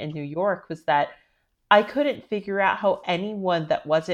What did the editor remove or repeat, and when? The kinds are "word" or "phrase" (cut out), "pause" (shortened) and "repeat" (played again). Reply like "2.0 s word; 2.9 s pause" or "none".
none